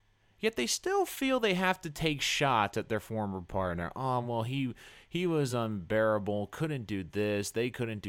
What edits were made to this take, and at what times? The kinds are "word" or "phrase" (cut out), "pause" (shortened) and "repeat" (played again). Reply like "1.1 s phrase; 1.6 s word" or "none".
none